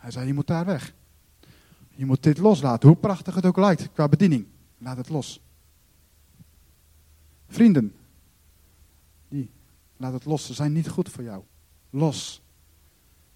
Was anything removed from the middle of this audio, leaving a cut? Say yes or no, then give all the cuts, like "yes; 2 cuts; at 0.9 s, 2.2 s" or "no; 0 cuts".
no; 0 cuts